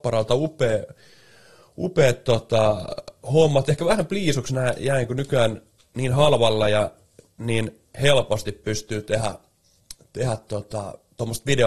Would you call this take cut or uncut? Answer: uncut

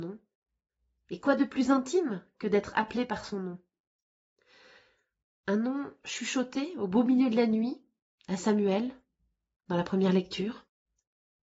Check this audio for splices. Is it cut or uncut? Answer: uncut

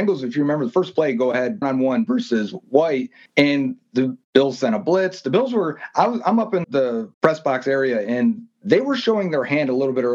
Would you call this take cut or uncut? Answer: cut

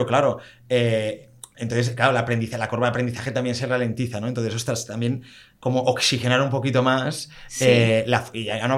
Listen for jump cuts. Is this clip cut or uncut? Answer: uncut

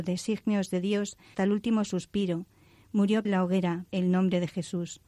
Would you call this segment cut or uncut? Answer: cut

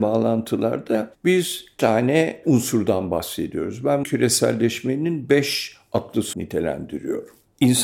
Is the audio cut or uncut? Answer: cut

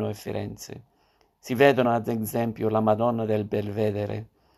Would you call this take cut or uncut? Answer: uncut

